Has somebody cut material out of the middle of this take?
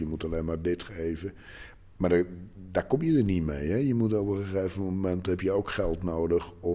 no; 0 cuts

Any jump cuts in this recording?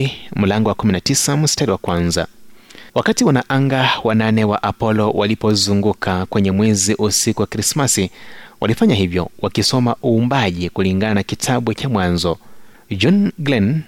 yes; 2 cuts; at 2.9 s, 12.7 s

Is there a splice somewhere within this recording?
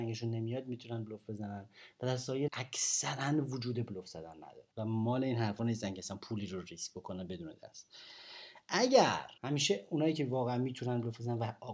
yes; 3 cuts; at 2.5 s, 4.7 s, 9.4 s

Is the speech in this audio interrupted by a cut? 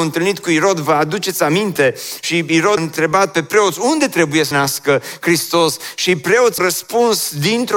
yes; 3 cuts; at 2.8 s, 4.5 s, 6.6 s

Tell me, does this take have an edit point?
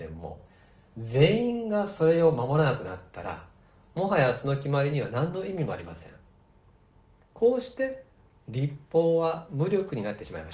no; 0 cuts

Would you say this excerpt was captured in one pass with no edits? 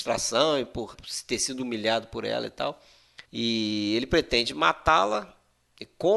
no; 2 cuts; at 0.9 s, 3.2 s

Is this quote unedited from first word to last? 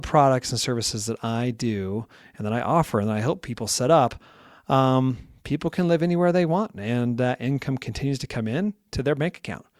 yes; 0 cuts

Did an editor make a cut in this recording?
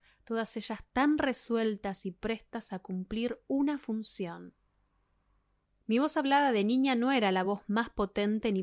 no; 0 cuts

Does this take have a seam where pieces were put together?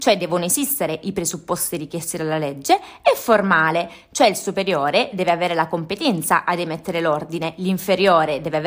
no; 0 cuts

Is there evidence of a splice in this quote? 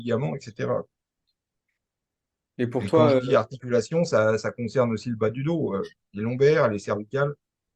no; 0 cuts

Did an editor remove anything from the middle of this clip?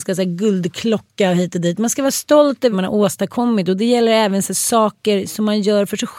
yes; 1 cut; at 2.7 s

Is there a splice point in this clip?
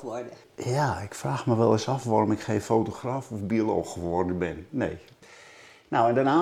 no; 0 cuts

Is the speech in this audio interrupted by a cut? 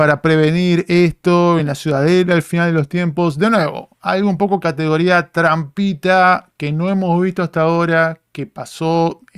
no; 0 cuts

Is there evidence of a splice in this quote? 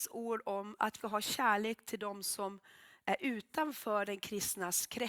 yes; 1 cut; at 1.0 s

